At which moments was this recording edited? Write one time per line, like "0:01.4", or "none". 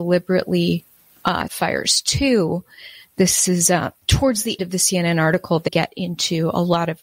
0:01.5
0:04.0
0:04.6
0:05.7